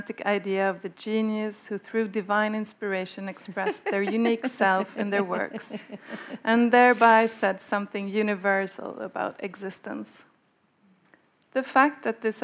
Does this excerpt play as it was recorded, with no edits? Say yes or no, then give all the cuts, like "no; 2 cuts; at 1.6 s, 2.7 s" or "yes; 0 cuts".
yes; 0 cuts